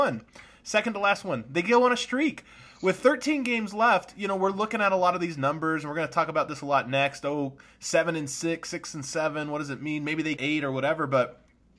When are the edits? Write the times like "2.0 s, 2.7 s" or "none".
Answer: 10.4 s